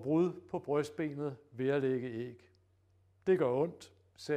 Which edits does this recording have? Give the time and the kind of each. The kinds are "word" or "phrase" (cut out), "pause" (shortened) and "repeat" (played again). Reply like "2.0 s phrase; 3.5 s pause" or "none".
none